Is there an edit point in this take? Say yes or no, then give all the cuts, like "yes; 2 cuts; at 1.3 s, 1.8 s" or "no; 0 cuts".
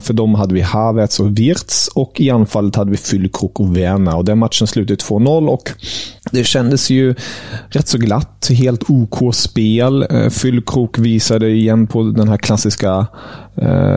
yes; 1 cut; at 6.2 s